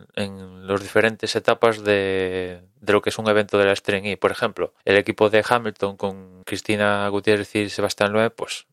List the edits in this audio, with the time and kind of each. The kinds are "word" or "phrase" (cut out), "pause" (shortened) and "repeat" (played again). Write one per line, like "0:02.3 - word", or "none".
0:04.8 - pause
0:06.4 - pause

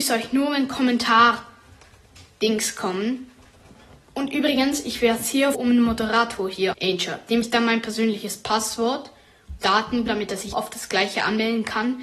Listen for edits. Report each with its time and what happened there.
0:05.5 - word
0:06.7 - word
0:07.4 - word
0:09.6 - word
0:10.1 - word
0:10.5 - word

